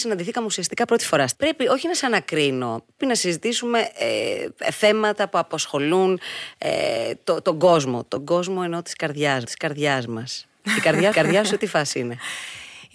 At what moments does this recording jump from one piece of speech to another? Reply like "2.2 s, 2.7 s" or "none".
1.3 s, 3.0 s, 9.5 s, 11.1 s